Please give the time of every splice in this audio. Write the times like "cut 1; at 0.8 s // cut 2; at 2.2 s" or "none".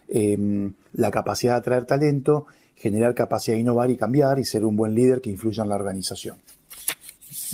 none